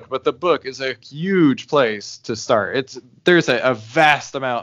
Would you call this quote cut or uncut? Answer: uncut